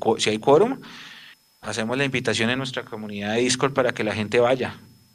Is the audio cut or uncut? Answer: uncut